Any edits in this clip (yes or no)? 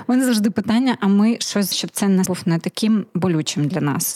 yes